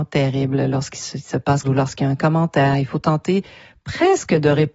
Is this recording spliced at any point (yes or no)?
yes